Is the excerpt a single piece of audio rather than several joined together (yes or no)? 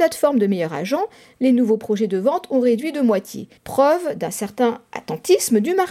no